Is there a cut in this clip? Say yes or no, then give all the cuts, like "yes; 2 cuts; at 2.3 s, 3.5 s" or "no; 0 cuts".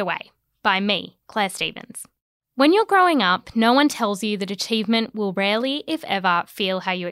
yes; 1 cut; at 2.3 s